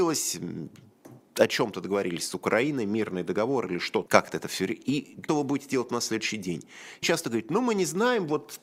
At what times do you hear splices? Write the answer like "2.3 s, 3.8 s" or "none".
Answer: 4.1 s, 5.3 s, 7.0 s